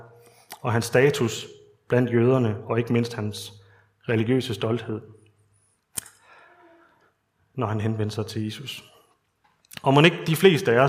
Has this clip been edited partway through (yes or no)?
no